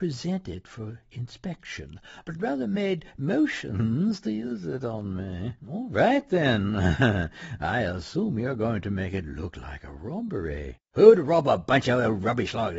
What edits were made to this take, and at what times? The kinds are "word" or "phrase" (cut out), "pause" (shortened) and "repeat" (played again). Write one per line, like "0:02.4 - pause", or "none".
0:05.6 - pause
0:10.8 - pause